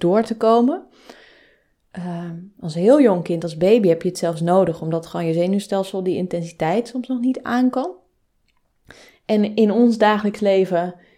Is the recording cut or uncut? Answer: uncut